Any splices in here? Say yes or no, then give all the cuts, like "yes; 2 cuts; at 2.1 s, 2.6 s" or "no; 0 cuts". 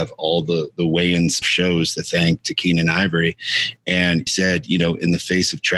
yes; 2 cuts; at 1.4 s, 4.3 s